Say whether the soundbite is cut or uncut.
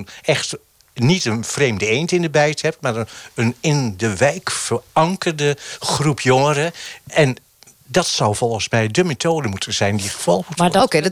uncut